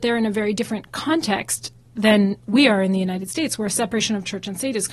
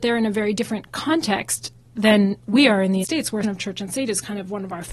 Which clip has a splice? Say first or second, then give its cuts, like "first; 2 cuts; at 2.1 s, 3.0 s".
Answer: second; 2 cuts; at 3.0 s, 3.4 s